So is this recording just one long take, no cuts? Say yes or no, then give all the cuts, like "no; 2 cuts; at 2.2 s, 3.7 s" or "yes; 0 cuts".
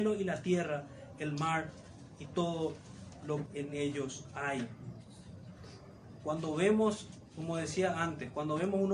no; 1 cut; at 3.5 s